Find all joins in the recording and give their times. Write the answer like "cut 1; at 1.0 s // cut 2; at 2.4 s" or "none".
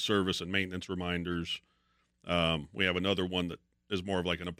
none